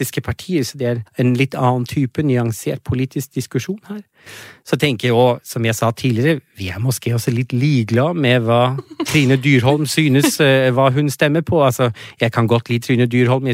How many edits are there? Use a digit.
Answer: 2